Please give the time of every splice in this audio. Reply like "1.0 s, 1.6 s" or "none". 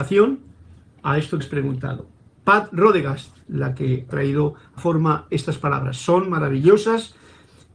1.4 s, 3.5 s, 4.1 s, 4.8 s